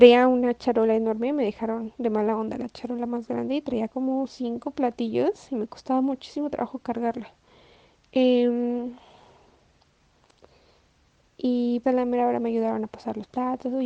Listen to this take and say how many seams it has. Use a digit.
1